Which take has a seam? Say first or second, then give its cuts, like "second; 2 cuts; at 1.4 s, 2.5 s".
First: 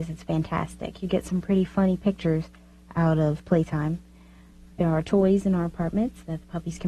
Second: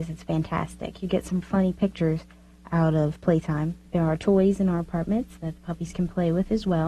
second; 2 cuts; at 1.4 s, 3.9 s